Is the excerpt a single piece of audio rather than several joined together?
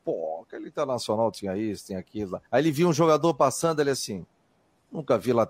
no; 1 cut; at 2.5 s

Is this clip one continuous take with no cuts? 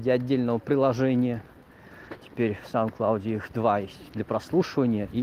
yes; 0 cuts

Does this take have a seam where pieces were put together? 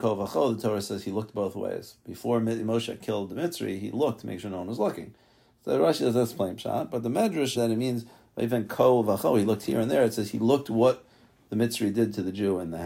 yes; 1 cut; at 7.5 s

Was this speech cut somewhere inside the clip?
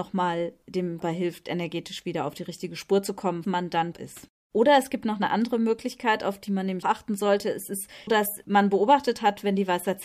yes; 5 cuts; at 1.0 s, 3.4 s, 3.9 s, 6.8 s, 8.1 s

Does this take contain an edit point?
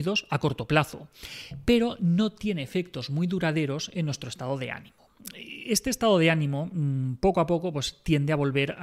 no; 0 cuts

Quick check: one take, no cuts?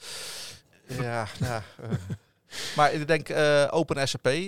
yes; 0 cuts

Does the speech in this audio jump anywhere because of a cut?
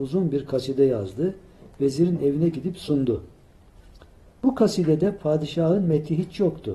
no; 0 cuts

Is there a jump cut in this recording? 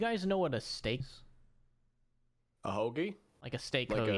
yes; 1 cut; at 1.0 s

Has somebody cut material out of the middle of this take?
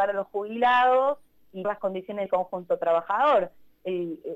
yes; 2 cuts; at 1.6 s, 2.3 s

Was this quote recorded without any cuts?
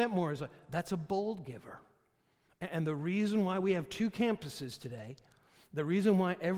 yes; 0 cuts

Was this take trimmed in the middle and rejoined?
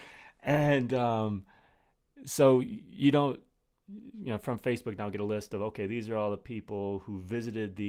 no; 0 cuts

